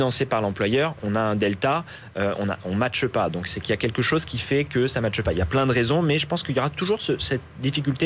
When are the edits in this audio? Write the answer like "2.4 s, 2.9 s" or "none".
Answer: 1.0 s